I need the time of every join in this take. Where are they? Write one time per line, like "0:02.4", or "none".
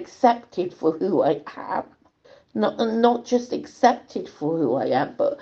0:02.2